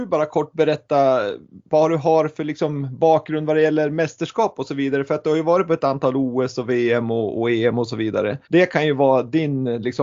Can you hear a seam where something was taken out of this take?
yes; 2 cuts; at 1.7 s, 8.4 s

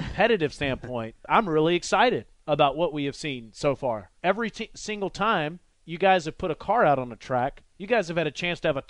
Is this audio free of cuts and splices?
no; 3 cuts; at 1.3 s, 4.2 s, 7.7 s

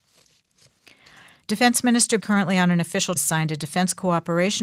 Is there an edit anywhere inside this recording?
yes; 2 cuts; at 2.2 s, 3.2 s

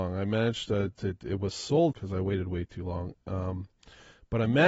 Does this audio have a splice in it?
yes; 1 cut; at 1.9 s

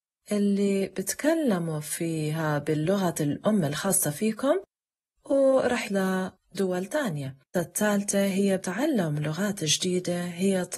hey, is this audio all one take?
no; 3 cuts; at 5.8 s, 7.5 s, 8.6 s

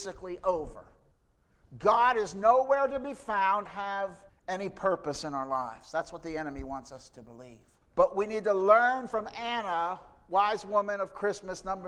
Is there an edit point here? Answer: yes; 4 cuts; at 1.1 s, 3.7 s, 4.3 s, 7.8 s

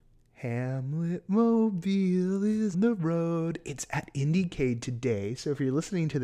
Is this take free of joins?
no; 1 cut; at 2.7 s

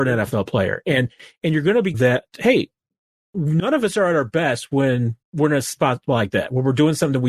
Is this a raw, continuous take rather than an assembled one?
no; 2 cuts; at 1.9 s, 5.2 s

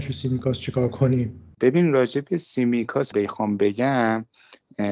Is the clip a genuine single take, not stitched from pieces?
no; 2 cuts; at 1.5 s, 3.1 s

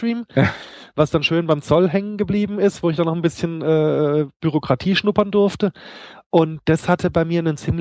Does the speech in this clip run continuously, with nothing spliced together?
yes; 0 cuts

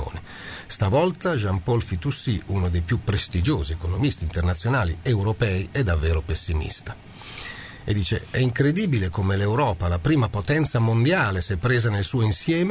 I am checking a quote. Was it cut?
no; 0 cuts

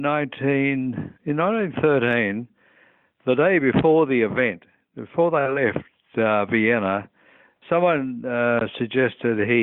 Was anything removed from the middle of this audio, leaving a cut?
yes; 1 cut; at 1.2 s

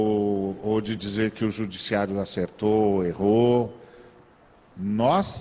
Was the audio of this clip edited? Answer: no; 0 cuts

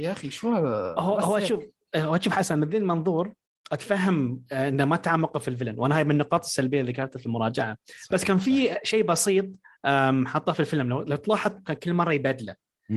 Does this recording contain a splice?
yes; 1 cut; at 11.6 s

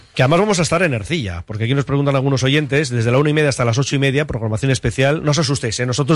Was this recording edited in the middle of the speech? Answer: no; 0 cuts

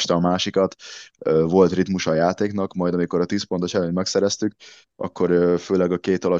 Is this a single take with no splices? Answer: yes; 0 cuts

